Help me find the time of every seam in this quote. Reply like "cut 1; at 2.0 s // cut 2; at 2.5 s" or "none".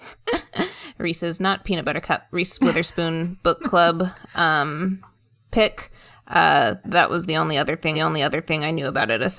cut 1; at 6.8 s // cut 2; at 7.9 s